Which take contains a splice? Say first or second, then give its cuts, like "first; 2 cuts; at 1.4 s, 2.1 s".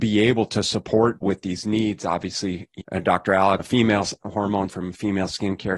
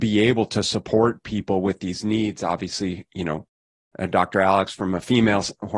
first; 4 cuts; at 1.2 s, 2.8 s, 3.6 s, 4.7 s